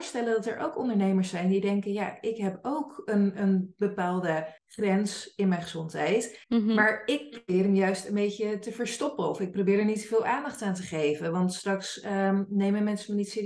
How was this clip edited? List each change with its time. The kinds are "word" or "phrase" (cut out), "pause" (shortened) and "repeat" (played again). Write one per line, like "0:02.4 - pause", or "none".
0:04.6 - pause
0:06.4 - pause